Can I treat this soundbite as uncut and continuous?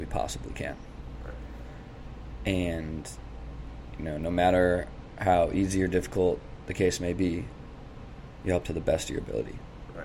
no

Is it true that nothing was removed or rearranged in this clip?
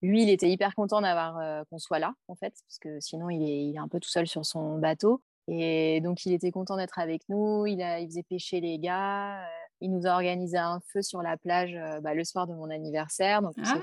no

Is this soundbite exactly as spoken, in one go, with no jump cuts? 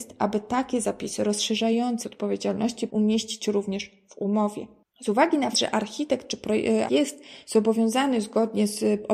no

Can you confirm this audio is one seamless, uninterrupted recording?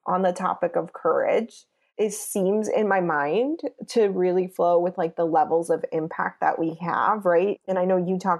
yes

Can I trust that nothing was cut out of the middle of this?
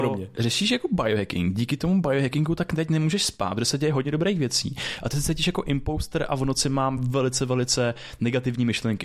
yes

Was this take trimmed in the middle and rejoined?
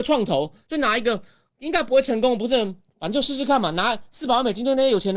no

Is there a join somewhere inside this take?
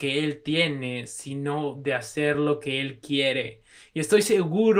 no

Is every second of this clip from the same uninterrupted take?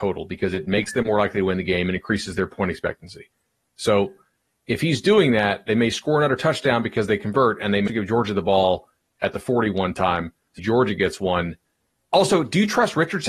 no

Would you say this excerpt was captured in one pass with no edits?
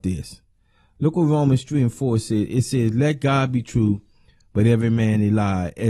yes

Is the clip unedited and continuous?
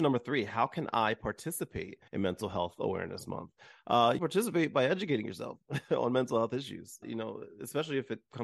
no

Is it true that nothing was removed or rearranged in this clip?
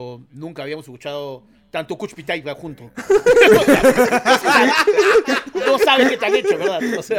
yes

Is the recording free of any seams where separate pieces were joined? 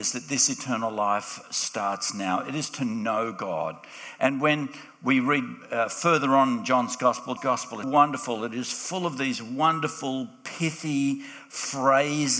no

